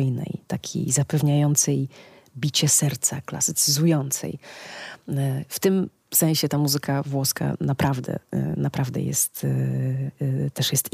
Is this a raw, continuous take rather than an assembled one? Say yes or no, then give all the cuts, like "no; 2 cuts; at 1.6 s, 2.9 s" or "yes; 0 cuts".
yes; 0 cuts